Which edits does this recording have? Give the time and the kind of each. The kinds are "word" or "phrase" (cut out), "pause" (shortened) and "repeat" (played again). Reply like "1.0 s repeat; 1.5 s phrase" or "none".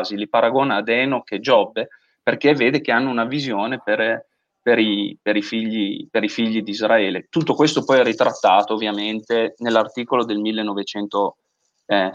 none